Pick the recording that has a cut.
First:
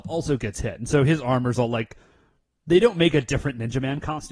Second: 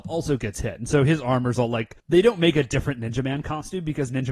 second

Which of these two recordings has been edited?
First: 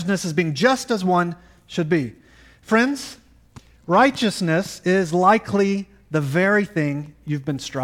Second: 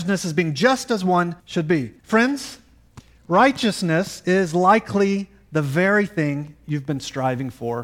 second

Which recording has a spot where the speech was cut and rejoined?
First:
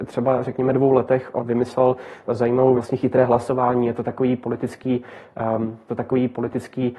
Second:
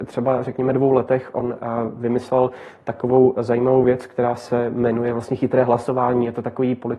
first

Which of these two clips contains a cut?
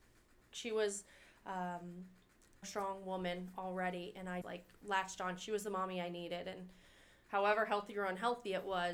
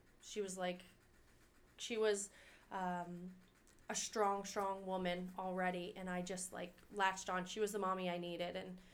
first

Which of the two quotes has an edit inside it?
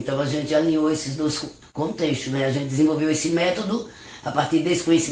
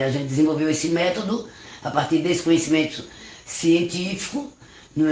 first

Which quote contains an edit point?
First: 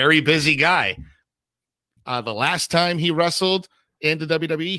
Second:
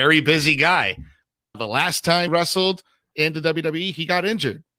second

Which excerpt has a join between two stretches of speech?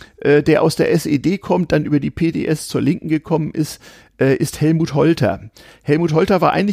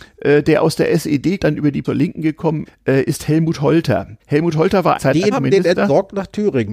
second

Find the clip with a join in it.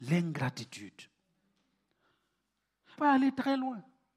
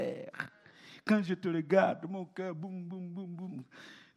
first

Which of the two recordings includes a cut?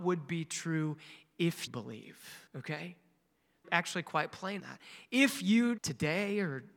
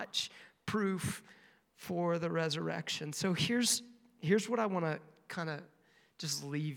first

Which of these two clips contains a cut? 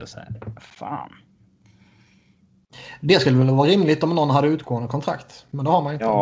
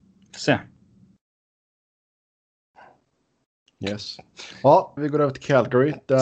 second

